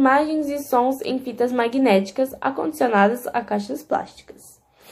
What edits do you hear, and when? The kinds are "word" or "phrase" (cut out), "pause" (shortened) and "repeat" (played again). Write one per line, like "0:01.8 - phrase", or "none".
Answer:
none